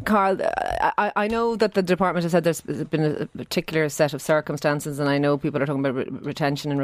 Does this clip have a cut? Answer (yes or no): no